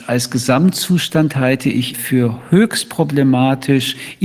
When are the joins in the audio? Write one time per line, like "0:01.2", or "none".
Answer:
0:01.9